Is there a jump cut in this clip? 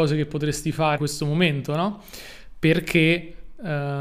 yes; 1 cut; at 1.0 s

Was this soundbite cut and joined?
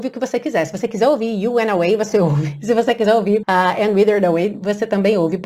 yes; 1 cut; at 3.4 s

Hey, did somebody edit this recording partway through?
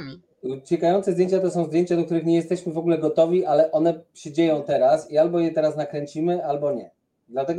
no; 0 cuts

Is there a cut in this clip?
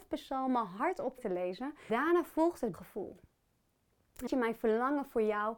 yes; 4 cuts; at 1.2 s, 1.9 s, 2.7 s, 4.3 s

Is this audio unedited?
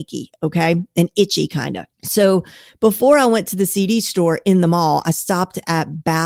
no; 1 cut; at 1.9 s

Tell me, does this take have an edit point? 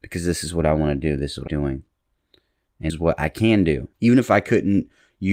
yes; 3 cuts; at 1.5 s, 2.9 s, 3.9 s

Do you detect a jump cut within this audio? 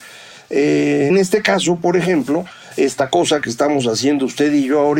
yes; 1 cut; at 1.1 s

